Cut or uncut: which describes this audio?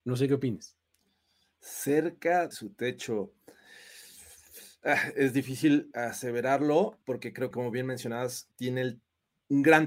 cut